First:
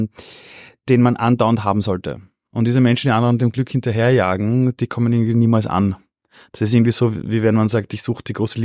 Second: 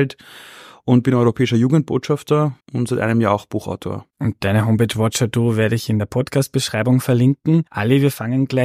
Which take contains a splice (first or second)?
second